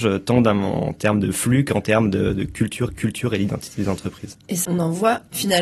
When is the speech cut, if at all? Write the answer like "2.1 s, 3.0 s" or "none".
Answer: 2.9 s, 4.6 s